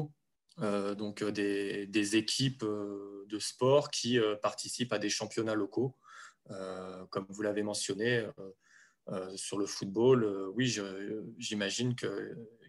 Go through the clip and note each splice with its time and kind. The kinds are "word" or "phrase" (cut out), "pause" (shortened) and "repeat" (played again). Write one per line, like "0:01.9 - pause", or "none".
none